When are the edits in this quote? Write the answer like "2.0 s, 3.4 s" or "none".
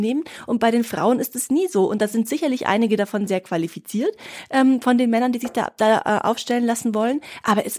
none